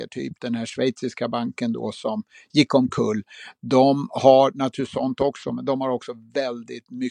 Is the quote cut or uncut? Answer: uncut